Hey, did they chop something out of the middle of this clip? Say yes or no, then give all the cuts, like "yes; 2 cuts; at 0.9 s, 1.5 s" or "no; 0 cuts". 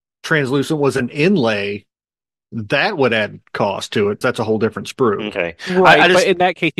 yes; 1 cut; at 4.2 s